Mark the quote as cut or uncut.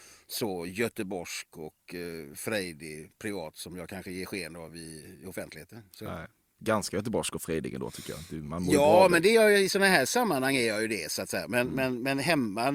uncut